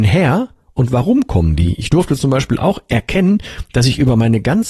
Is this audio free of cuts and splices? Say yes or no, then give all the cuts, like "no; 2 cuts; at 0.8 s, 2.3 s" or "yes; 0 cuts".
yes; 0 cuts